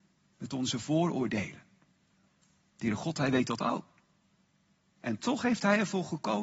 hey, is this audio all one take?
yes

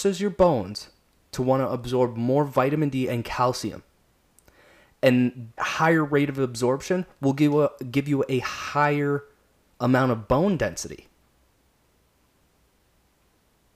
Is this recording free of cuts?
no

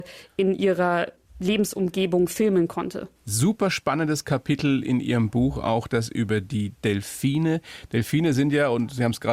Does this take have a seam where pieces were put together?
yes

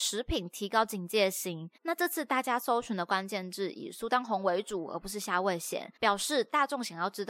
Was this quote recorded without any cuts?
no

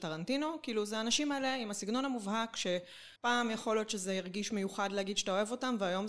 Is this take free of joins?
no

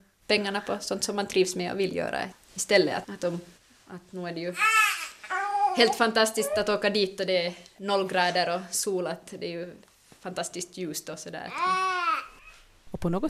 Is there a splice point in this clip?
yes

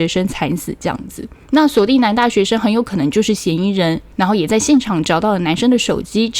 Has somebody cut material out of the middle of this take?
yes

